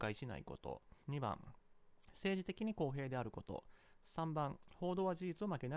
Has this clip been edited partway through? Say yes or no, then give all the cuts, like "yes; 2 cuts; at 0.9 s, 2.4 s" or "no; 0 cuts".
yes; 1 cut; at 1.0 s